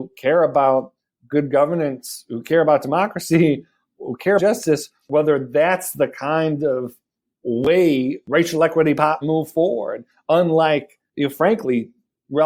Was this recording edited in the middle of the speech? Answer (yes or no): yes